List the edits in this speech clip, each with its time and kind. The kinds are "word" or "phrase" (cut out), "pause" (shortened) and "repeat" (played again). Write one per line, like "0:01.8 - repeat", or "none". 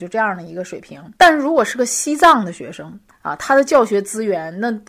0:01.2 - pause